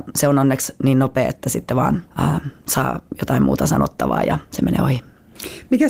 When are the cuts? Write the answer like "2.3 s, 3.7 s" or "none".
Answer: 2.1 s